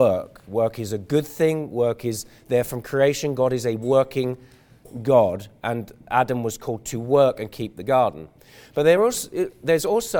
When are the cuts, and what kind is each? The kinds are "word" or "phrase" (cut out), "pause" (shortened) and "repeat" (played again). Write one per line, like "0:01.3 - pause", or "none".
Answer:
none